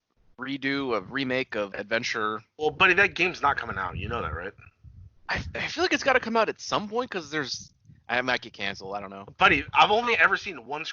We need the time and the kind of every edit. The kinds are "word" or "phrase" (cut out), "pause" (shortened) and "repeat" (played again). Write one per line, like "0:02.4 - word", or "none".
0:01.7 - word
0:05.2 - pause